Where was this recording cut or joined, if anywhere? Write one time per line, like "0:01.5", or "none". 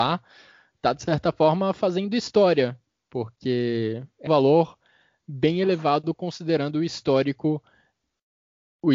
0:04.3